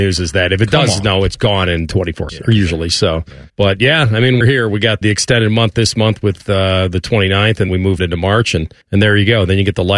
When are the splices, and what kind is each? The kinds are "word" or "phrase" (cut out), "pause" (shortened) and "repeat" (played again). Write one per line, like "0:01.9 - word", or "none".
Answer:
0:02.3 - word
0:03.5 - pause
0:04.4 - word
0:05.0 - word
0:07.7 - word
0:08.0 - word
0:08.8 - pause